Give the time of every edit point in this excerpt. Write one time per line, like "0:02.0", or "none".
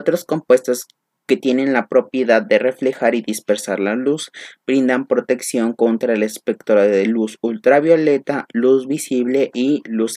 none